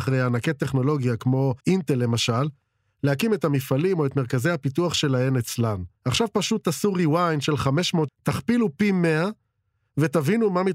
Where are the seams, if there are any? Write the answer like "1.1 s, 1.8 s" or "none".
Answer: 1.6 s, 6.0 s, 8.1 s